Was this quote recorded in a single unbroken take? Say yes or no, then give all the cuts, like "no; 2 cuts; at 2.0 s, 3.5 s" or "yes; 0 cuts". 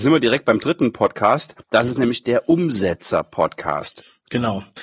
no; 1 cut; at 1.6 s